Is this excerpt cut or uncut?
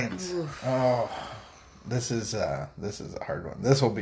uncut